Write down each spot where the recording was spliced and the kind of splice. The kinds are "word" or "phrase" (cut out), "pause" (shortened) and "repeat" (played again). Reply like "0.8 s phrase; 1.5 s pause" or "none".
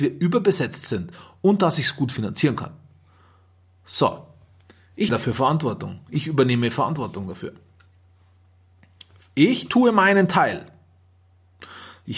5.1 s word